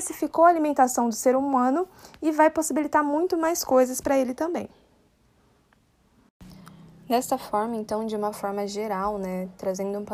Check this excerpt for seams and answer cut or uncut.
uncut